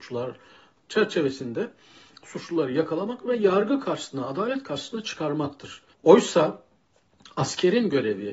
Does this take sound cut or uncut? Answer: cut